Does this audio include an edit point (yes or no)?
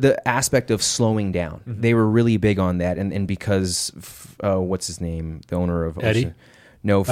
no